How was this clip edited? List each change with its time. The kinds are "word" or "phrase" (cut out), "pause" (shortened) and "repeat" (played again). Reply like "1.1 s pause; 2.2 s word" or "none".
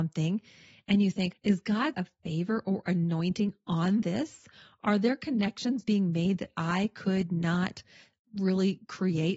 1.3 s word; 1.9 s word